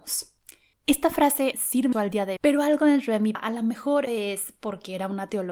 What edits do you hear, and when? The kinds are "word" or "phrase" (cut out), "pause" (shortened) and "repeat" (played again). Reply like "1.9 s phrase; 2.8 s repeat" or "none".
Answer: 1.5 s word; 1.9 s word; 2.4 s word; 3.3 s word; 4.1 s word